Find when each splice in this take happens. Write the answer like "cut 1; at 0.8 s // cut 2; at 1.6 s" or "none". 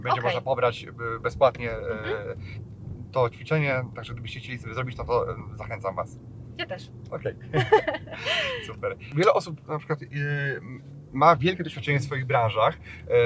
none